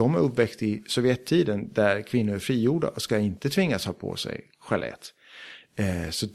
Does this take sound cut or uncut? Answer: uncut